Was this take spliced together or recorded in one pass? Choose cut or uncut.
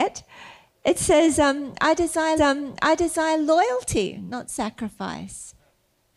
cut